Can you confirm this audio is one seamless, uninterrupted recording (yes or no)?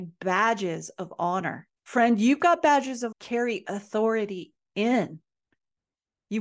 no